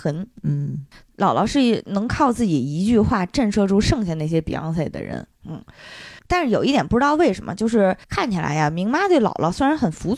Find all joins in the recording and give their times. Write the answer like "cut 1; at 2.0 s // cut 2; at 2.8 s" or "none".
cut 1; at 6.2 s // cut 2; at 8.0 s